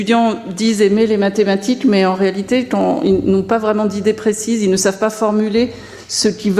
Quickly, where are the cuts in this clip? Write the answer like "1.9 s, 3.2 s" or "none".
none